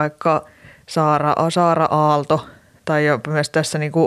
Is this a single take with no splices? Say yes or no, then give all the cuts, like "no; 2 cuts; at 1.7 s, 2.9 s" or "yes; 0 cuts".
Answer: yes; 0 cuts